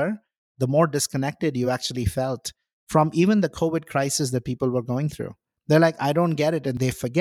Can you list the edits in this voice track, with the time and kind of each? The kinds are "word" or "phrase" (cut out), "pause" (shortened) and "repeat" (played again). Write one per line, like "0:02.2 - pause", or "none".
none